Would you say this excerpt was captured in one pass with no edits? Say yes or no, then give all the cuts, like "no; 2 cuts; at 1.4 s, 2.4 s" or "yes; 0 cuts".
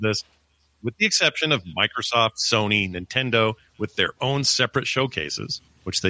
yes; 0 cuts